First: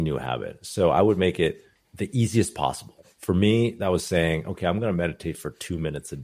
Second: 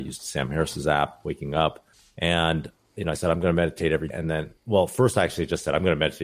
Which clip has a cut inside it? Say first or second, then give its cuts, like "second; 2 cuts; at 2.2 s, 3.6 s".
second; 2 cuts; at 4.1 s, 4.6 s